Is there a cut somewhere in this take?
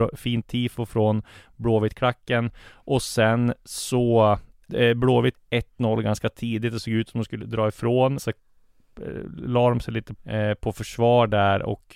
yes; 5 cuts; at 4.7 s, 5.3 s, 7.4 s, 8.2 s, 10.2 s

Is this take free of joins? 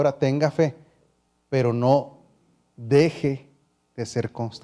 yes; 0 cuts

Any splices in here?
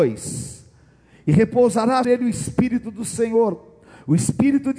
yes; 1 cut; at 2.0 s

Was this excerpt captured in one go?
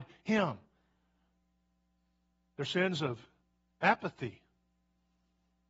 yes; 0 cuts

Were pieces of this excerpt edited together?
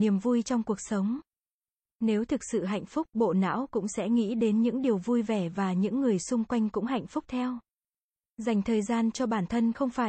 no; 0 cuts

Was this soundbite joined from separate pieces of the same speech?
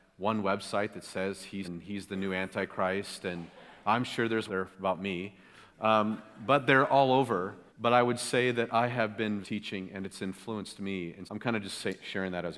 yes; 5 cuts; at 1.6 s, 4.5 s, 7.7 s, 9.4 s, 11.3 s

